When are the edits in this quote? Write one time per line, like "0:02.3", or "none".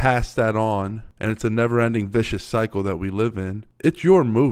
none